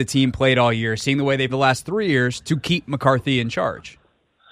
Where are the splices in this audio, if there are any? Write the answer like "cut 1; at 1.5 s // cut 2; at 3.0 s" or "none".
cut 1; at 1.5 s